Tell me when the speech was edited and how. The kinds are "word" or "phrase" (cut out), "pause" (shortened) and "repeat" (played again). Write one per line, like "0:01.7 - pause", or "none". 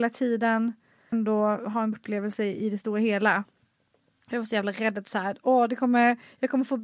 0:01.1 - phrase
0:01.9 - word